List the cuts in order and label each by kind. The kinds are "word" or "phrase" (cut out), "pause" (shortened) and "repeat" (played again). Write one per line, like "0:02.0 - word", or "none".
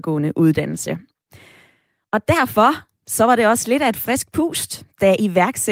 none